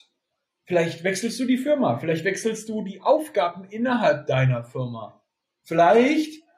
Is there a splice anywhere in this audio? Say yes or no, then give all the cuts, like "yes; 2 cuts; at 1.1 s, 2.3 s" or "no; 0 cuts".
no; 0 cuts